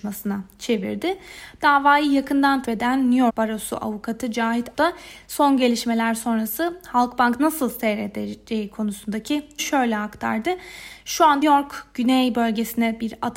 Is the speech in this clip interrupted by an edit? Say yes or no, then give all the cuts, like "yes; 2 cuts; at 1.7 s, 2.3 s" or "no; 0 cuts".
yes; 6 cuts; at 2.6 s, 3.3 s, 4.7 s, 7.4 s, 9.6 s, 11.4 s